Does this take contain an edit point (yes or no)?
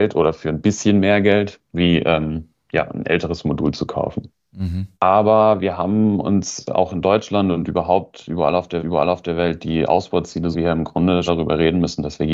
yes